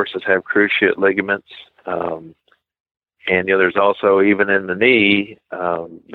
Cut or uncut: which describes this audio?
uncut